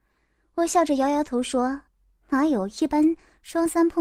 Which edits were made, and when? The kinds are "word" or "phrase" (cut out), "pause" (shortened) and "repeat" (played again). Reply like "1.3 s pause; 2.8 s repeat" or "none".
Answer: 1.9 s pause